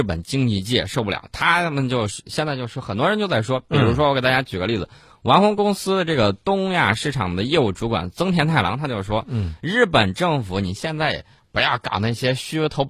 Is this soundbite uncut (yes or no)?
yes